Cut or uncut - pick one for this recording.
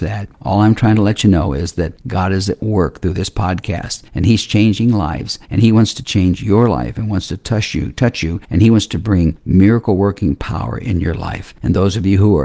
uncut